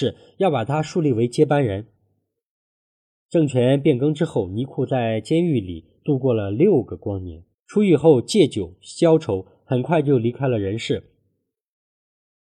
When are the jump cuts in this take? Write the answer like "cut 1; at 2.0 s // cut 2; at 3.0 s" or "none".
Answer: cut 1; at 7.5 s

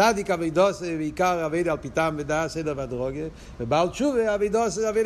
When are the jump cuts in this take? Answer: none

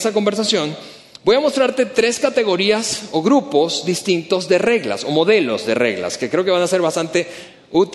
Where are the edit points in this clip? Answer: none

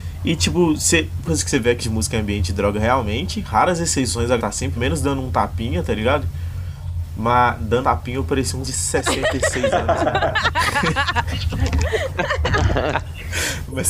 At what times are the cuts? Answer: cut 1; at 1.3 s // cut 2; at 1.8 s // cut 3; at 4.4 s // cut 4; at 4.8 s // cut 5; at 7.8 s // cut 6; at 8.6 s

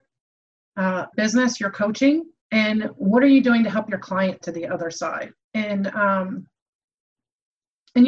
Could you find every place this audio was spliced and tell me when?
cut 1; at 1.1 s // cut 2; at 2.4 s // cut 3; at 4.4 s // cut 4; at 5.4 s

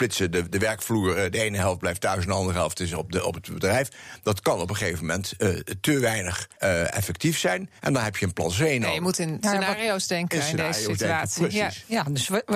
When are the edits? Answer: cut 1; at 6.5 s // cut 2; at 7.8 s

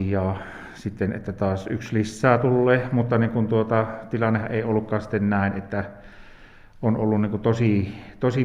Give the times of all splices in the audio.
none

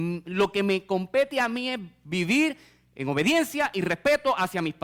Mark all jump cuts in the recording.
none

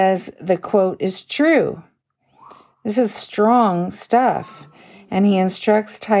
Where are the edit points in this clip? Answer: none

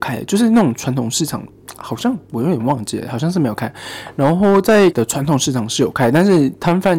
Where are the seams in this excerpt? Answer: cut 1; at 4.9 s

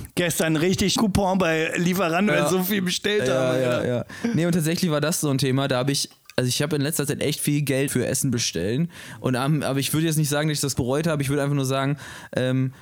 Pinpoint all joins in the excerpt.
cut 1; at 1.0 s // cut 2; at 2.3 s // cut 3; at 7.9 s // cut 4; at 10.7 s

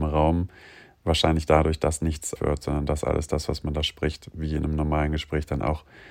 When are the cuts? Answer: cut 1; at 2.4 s

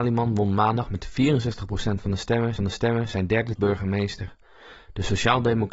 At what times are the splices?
cut 1; at 2.6 s // cut 2; at 3.6 s

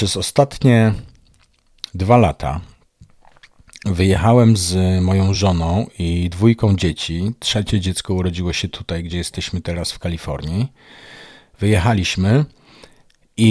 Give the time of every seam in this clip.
none

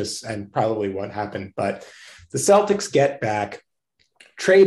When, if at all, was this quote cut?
none

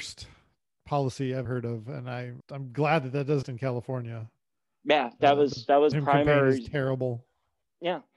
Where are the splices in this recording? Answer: cut 1; at 1.5 s // cut 2; at 2.4 s // cut 3; at 3.4 s // cut 4; at 5.9 s

